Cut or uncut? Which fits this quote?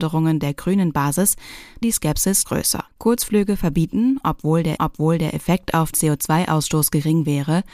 cut